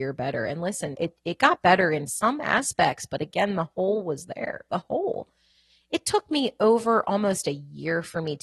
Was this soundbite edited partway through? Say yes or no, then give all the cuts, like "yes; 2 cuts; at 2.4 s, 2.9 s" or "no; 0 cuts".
yes; 1 cut; at 0.9 s